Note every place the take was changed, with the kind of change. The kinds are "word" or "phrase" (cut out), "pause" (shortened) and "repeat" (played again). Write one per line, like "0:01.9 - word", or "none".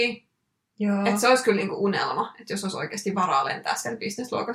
none